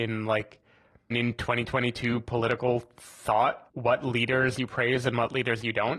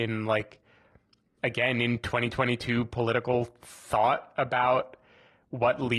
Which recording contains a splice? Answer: first; 2 cuts; at 1.1 s, 3.7 s

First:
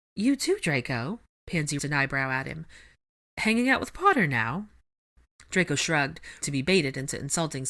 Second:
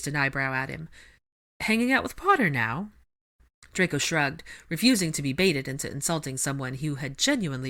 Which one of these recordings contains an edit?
first; 2 cuts; at 1.8 s, 6.4 s

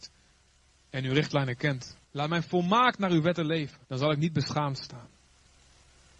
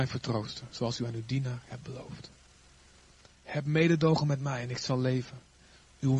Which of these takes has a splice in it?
first; 2 cuts; at 2.0 s, 3.8 s

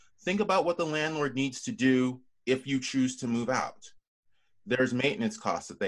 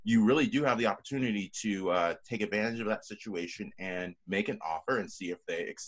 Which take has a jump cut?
second; 1 cut; at 4.2 s

